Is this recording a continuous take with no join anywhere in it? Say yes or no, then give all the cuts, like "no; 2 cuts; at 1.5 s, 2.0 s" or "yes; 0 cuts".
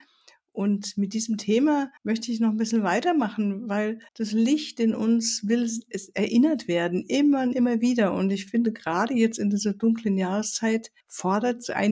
no; 3 cuts; at 2.0 s, 4.1 s, 11.0 s